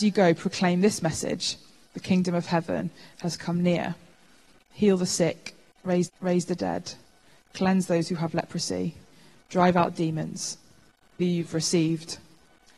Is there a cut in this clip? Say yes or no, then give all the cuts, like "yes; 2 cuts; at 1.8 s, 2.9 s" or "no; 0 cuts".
yes; 2 cuts; at 6.1 s, 11.2 s